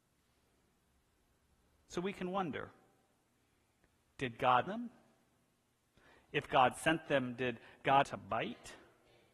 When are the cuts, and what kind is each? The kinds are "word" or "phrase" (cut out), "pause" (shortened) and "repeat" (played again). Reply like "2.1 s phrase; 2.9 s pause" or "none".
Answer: 4.7 s word; 8.0 s phrase